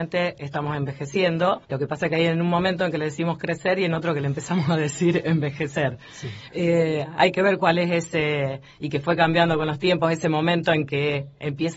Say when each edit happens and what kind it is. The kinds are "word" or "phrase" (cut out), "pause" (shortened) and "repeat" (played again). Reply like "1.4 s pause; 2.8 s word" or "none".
1.6 s pause